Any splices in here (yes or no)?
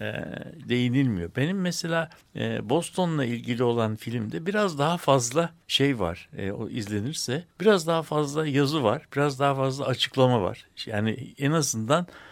yes